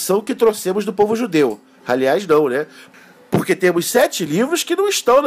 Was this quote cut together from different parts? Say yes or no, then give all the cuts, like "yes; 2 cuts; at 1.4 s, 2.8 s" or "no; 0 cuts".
no; 0 cuts